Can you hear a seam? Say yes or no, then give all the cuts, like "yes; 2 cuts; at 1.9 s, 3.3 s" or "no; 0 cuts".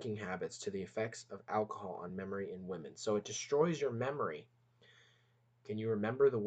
no; 0 cuts